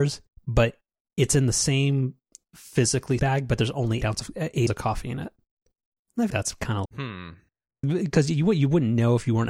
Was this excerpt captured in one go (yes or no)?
no